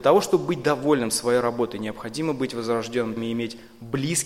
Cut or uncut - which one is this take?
cut